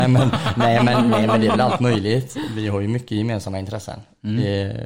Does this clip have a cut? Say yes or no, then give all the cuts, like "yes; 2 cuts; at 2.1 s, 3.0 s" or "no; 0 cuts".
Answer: no; 0 cuts